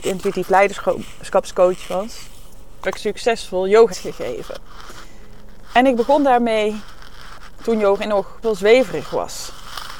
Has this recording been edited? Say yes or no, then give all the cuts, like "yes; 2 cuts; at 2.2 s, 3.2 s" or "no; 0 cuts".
yes; 3 cuts; at 2.8 s, 3.9 s, 8.4 s